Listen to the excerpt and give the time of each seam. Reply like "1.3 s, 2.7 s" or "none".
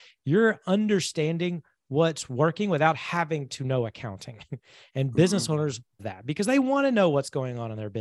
6.0 s